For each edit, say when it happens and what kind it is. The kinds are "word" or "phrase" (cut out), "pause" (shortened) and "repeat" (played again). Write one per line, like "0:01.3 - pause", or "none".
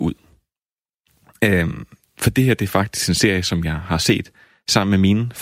none